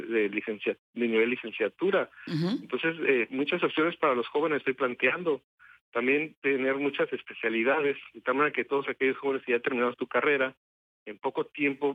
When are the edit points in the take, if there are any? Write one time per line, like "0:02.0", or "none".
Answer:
none